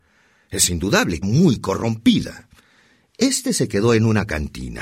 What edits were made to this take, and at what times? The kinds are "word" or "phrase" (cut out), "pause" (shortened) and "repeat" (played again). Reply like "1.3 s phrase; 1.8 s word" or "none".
1.2 s phrase